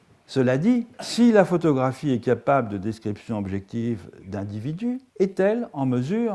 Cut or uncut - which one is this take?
cut